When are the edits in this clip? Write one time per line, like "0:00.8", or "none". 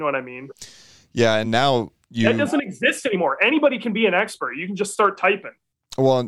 none